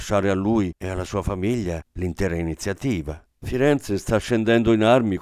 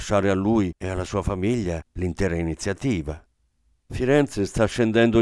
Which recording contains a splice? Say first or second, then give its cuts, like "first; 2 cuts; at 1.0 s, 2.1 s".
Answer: first; 1 cut; at 3.3 s